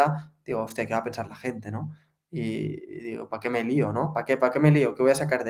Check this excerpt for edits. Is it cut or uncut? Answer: uncut